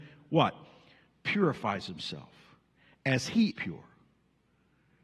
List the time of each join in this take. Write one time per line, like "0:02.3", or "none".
0:03.5